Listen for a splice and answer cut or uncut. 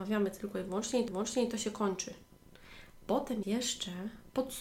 cut